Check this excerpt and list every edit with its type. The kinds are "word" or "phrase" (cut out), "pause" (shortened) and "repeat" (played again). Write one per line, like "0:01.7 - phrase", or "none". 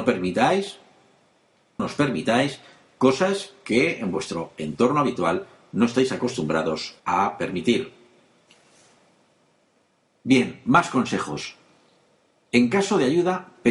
0:01.8 - word
0:07.0 - pause